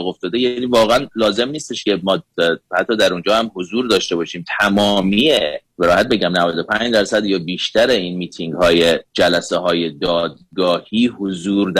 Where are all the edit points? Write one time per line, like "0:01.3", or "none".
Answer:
0:05.7
0:09.1

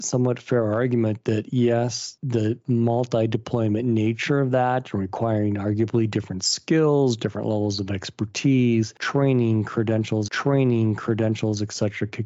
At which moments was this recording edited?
0:10.3

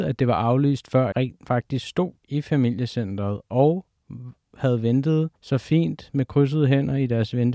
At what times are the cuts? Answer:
0:01.1
0:05.4

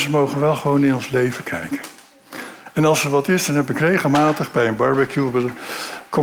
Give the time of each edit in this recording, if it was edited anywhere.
none

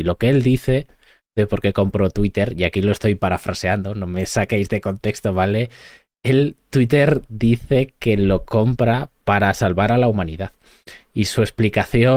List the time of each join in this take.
none

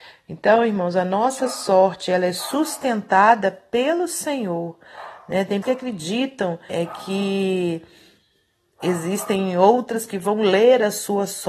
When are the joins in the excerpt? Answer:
0:05.6
0:06.7
0:10.1

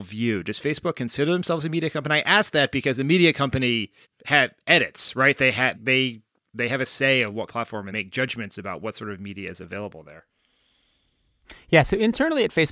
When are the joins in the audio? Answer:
0:04.0
0:05.7
0:07.5
0:07.9

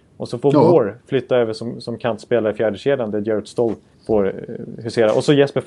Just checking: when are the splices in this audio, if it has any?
0:03.9

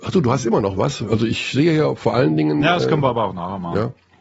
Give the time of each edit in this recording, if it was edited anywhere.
none

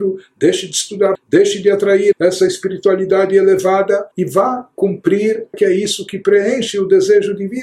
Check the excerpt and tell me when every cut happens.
0:01.1
0:02.1
0:04.1
0:05.5

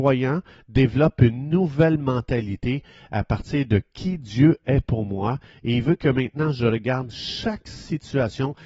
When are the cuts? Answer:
none

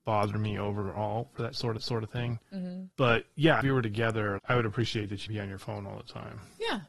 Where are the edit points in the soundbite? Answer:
0:01.8
0:02.9
0:03.6
0:04.4
0:05.3

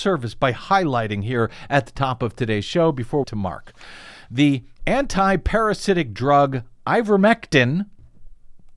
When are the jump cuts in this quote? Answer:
0:03.2
0:04.8

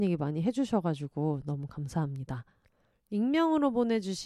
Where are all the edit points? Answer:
none

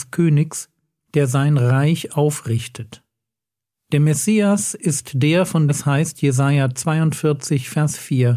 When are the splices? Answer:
0:05.7

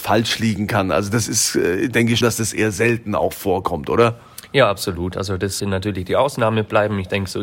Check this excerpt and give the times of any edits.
0:02.2
0:05.6

